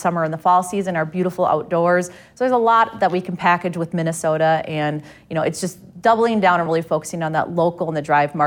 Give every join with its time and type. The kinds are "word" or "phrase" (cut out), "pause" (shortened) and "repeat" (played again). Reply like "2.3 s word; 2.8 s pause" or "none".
none